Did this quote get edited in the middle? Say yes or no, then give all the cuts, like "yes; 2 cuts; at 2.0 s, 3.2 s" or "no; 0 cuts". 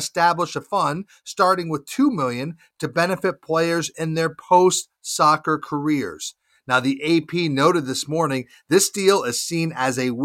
no; 0 cuts